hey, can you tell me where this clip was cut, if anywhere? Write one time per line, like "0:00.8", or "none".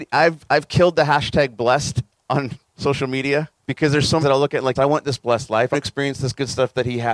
0:03.6
0:04.2
0:04.8
0:05.7